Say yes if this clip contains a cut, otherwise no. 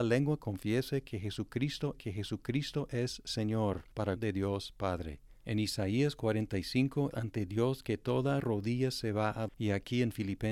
yes